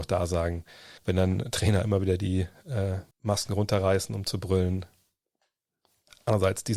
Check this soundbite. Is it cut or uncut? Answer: cut